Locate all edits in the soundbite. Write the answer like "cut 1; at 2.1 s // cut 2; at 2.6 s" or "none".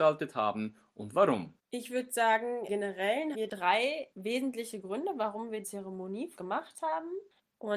cut 1; at 1.6 s // cut 2; at 2.7 s // cut 3; at 3.3 s // cut 4; at 4.1 s // cut 5; at 5.6 s // cut 6; at 6.4 s